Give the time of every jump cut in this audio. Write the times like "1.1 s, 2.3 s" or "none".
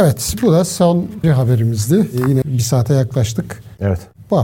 1.2 s, 2.4 s